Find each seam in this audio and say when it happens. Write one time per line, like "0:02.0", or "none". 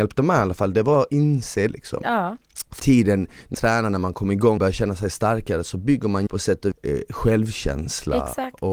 0:01.7
0:02.8
0:03.5
0:04.6
0:06.3
0:06.7